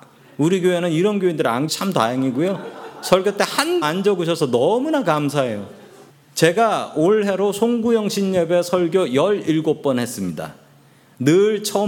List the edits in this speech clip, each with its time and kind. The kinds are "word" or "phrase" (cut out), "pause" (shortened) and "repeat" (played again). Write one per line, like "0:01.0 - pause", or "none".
0:01.7 - word
0:03.8 - word
0:06.1 - pause